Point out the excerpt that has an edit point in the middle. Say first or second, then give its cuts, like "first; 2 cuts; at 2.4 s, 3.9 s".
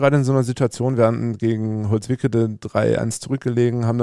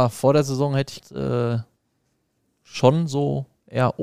second; 1 cut; at 1.0 s